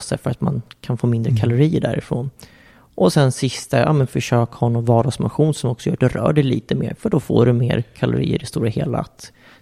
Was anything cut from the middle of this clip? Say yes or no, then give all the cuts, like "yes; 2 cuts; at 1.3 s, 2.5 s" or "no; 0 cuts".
no; 0 cuts